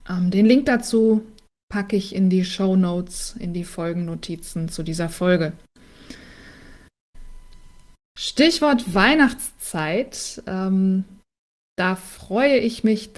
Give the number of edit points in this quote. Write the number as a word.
zero